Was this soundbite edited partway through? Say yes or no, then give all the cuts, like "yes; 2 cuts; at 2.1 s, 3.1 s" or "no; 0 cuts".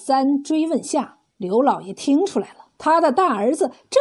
yes; 2 cuts; at 1.3 s, 2.7 s